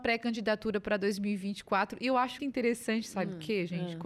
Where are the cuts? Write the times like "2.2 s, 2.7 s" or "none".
2.4 s